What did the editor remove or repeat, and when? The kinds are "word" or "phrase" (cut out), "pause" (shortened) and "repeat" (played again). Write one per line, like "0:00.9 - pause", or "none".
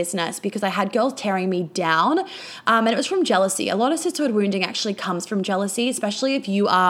none